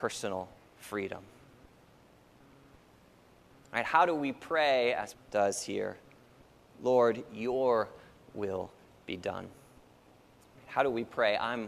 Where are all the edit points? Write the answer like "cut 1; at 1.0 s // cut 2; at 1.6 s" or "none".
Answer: cut 1; at 5.1 s